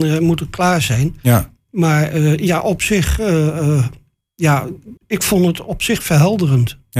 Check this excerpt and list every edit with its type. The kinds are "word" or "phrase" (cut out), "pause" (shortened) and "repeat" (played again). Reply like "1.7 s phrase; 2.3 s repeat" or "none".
5.0 s pause